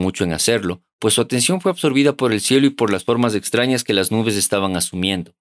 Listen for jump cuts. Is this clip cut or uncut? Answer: uncut